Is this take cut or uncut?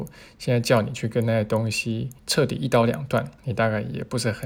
cut